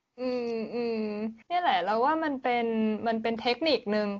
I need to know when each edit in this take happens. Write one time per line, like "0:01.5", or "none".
0:01.4